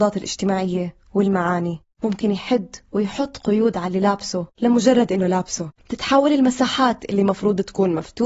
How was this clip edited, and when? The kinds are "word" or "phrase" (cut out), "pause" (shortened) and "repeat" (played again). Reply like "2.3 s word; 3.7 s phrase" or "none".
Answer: 1.9 s pause; 4.5 s pause; 5.7 s pause